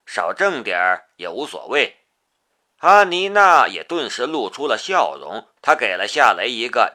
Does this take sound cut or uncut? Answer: cut